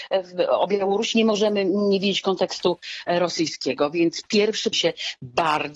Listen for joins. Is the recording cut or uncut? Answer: cut